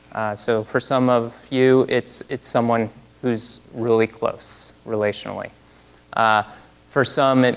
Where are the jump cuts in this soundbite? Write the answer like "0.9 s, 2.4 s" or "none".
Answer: none

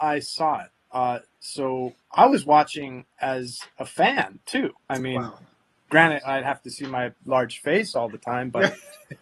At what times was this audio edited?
2.0 s, 4.8 s

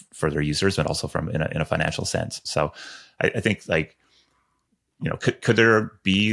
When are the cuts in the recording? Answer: none

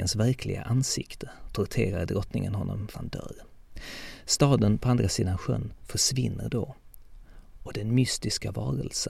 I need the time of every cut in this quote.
2.9 s

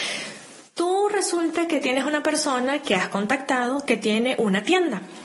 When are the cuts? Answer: none

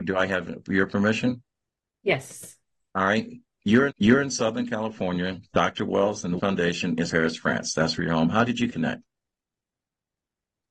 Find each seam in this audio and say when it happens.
3.9 s, 6.4 s, 7.1 s, 8.7 s

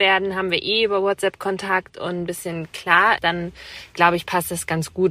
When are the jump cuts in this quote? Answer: 2.3 s, 3.2 s

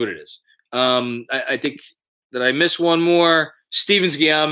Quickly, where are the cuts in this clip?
none

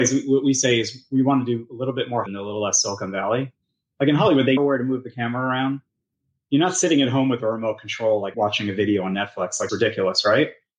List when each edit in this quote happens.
2.3 s, 4.6 s, 8.3 s, 9.7 s

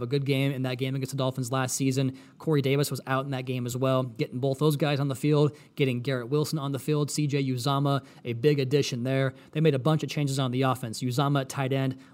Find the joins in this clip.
none

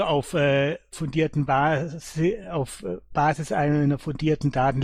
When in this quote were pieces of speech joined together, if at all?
none

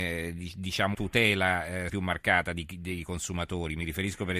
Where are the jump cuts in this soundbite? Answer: 0.9 s, 1.9 s

